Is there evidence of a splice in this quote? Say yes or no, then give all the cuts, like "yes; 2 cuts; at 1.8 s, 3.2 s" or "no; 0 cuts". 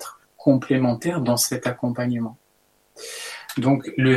no; 0 cuts